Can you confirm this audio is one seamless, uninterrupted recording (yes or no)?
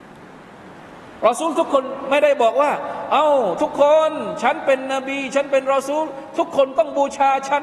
yes